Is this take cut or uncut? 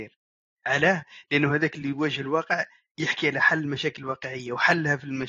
uncut